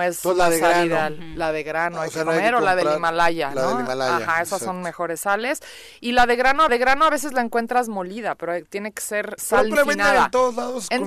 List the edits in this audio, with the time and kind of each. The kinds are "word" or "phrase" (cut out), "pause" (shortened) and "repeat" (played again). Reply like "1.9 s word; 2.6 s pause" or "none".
6.7 s repeat; 9.4 s word; 9.7 s word